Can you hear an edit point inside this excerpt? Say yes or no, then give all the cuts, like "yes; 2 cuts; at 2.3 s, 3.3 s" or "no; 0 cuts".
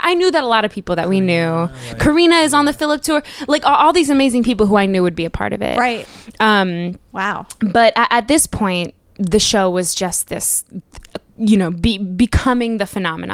no; 0 cuts